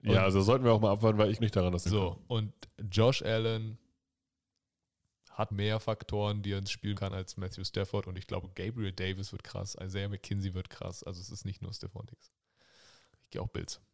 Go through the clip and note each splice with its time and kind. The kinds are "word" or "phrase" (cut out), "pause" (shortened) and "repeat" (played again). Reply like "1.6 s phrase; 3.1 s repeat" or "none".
1.4 s word; 1.9 s phrase; 5.5 s word; 7.0 s word